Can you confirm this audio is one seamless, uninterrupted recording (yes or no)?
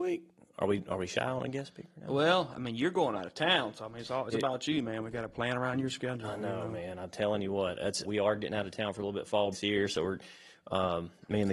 no